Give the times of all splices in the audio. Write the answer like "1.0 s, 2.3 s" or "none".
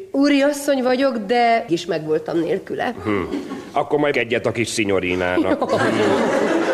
1.7 s, 4.1 s

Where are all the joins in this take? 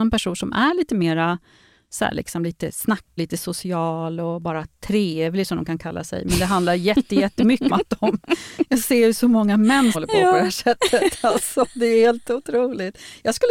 3.2 s, 7.7 s, 9.9 s

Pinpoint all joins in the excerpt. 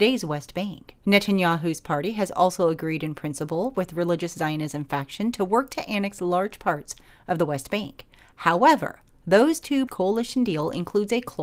9.9 s

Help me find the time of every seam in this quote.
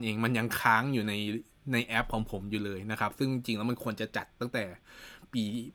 none

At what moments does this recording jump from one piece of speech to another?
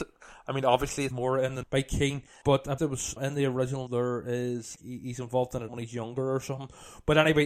1.1 s, 1.6 s, 2.4 s, 2.8 s, 3.2 s, 3.9 s, 4.8 s, 5.7 s

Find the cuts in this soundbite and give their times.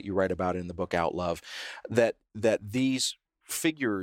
none

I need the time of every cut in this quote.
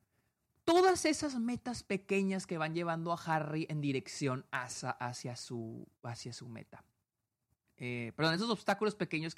none

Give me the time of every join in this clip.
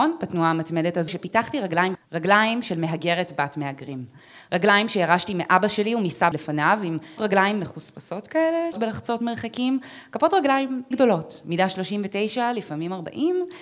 1.1 s, 1.9 s, 6.3 s, 7.2 s, 8.7 s, 10.9 s

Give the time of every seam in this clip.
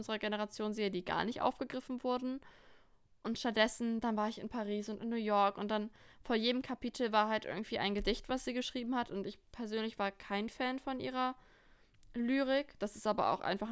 none

